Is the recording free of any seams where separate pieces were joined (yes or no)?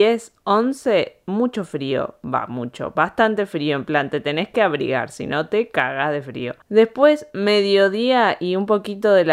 no